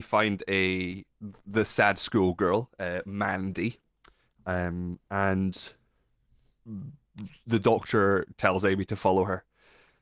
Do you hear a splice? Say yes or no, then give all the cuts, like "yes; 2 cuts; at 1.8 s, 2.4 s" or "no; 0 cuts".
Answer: no; 0 cuts